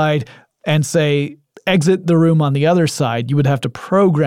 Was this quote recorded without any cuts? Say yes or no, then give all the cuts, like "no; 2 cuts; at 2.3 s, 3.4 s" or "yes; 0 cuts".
yes; 0 cuts